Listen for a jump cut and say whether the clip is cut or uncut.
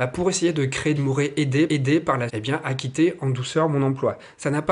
cut